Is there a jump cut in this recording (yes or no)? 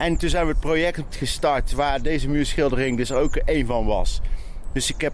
yes